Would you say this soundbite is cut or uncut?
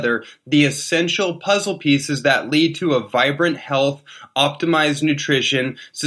uncut